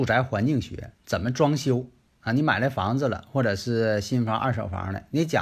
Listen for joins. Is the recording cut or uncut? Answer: uncut